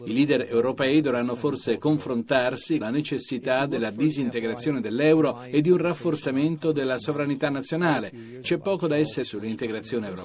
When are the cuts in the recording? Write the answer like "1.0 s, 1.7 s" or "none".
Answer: 2.8 s, 8.4 s, 9.2 s